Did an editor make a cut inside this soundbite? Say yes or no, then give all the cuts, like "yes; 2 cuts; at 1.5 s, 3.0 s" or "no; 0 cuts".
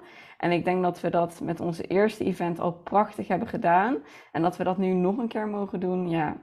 no; 0 cuts